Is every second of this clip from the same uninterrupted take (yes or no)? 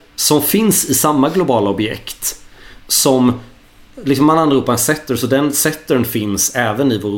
yes